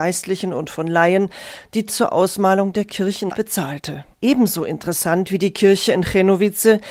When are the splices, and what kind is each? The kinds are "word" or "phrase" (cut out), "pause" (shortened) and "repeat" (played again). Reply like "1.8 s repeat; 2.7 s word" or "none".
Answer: 1.9 s phrase; 3.3 s phrase; 4.1 s pause

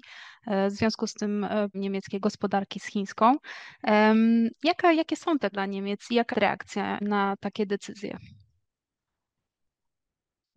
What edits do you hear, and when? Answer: 1.7 s word; 2.2 s word; 4.9 s word; 5.5 s word; 6.3 s word; 7.0 s word

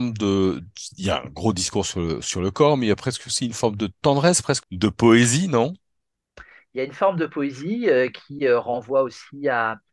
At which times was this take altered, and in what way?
4.6 s word

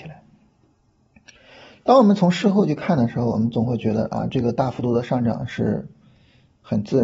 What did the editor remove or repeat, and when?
none

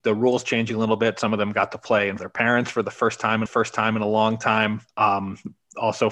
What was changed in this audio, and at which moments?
2.2 s phrase; 3.5 s repeat; 4.9 s pause

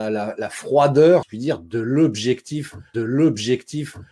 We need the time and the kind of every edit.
1.2 s word; 2.9 s repeat

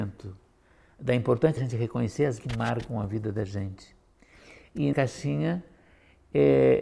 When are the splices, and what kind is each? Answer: 1.6 s word; 2.4 s word; 4.9 s word

